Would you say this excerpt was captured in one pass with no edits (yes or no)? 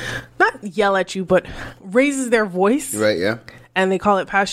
yes